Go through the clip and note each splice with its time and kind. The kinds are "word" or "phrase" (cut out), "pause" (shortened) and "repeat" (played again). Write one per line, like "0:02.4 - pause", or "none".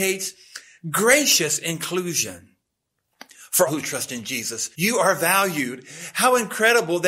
0:03.7 - word
0:04.7 - pause